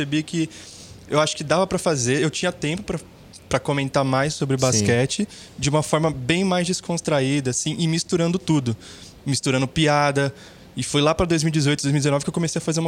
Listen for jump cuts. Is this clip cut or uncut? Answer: uncut